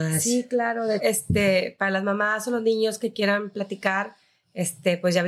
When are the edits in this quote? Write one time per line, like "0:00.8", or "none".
0:01.0